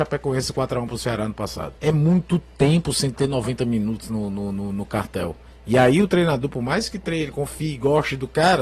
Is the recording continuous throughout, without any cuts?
no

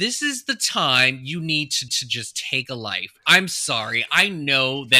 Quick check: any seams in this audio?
yes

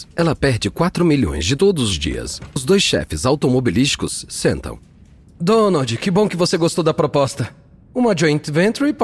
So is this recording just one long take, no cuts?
no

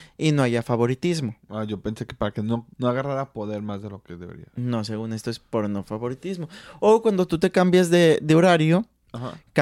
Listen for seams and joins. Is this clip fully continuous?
no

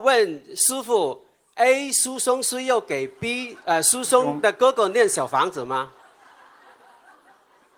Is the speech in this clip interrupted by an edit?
yes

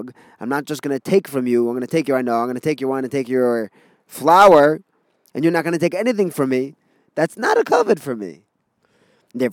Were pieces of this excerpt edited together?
no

